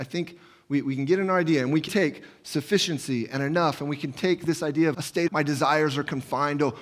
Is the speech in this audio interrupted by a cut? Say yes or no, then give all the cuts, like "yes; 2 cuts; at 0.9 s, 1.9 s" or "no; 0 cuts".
yes; 3 cuts; at 1.9 s, 4.9 s, 5.3 s